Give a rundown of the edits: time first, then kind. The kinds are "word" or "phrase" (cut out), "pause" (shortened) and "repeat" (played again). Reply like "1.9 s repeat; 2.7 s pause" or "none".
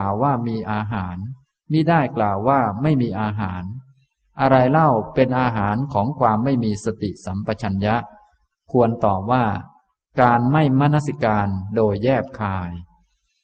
none